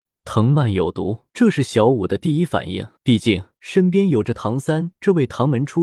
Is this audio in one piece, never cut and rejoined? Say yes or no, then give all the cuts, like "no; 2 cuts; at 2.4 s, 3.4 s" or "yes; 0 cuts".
no; 3 cuts; at 1.3 s, 3.0 s, 3.5 s